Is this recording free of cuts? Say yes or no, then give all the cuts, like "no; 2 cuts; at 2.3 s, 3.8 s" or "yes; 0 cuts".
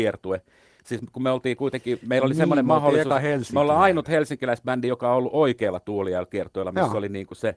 yes; 0 cuts